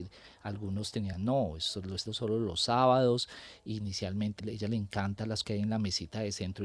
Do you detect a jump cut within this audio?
yes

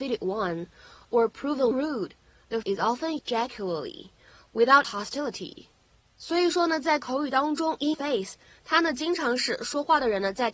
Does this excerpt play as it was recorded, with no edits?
no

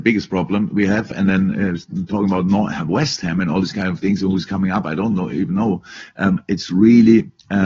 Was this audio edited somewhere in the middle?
no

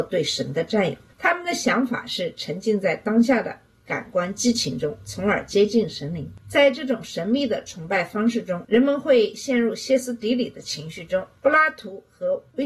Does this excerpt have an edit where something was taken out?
no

